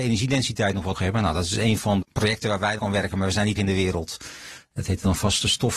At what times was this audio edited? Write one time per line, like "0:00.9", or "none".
0:00.9
0:02.0
0:02.8
0:03.6